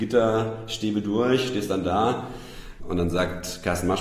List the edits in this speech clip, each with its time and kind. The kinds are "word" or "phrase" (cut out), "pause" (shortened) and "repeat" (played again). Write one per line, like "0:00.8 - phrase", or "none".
0:02.8 - word